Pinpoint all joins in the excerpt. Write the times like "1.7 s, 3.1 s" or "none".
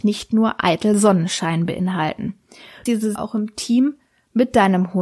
2.9 s, 3.2 s